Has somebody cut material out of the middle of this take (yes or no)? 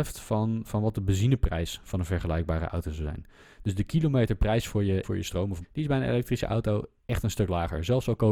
yes